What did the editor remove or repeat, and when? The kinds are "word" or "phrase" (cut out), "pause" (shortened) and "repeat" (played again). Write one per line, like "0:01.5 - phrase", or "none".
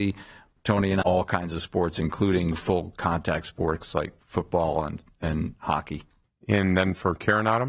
0:01.0 - phrase